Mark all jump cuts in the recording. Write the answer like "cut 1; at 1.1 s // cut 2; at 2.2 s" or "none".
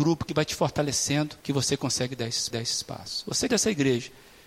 cut 1; at 1.4 s // cut 2; at 2.5 s // cut 3; at 3.5 s